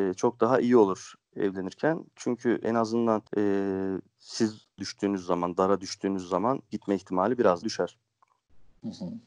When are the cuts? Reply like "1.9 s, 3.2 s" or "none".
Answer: 1.2 s, 2.6 s, 3.3 s, 4.8 s, 6.7 s, 7.6 s